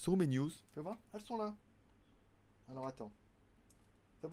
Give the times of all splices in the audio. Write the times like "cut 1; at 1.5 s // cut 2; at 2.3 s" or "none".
none